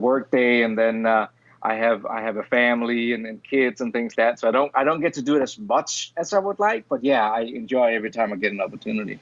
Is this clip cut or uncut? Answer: cut